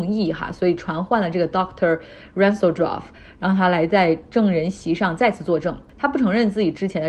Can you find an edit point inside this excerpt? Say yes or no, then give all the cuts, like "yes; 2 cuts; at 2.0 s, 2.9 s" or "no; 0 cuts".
no; 0 cuts